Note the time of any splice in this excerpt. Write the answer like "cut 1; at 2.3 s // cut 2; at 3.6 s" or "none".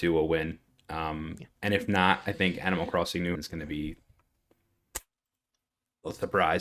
cut 1; at 3.3 s